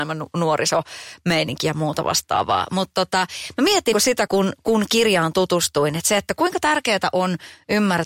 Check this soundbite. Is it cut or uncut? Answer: cut